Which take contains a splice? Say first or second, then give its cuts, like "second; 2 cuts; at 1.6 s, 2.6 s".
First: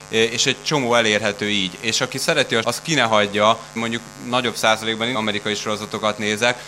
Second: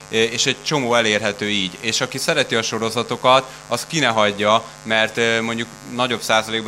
first; 3 cuts; at 2.6 s, 3.8 s, 5.1 s